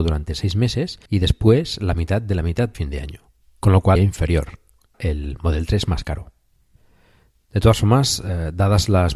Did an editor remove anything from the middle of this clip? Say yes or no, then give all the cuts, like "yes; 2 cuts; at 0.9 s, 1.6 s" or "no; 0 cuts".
yes; 5 cuts; at 1.1 s, 2.7 s, 3.4 s, 4.0 s, 4.9 s